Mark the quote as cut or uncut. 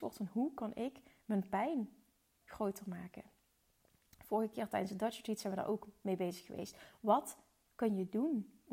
cut